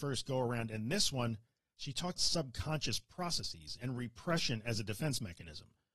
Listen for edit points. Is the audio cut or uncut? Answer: cut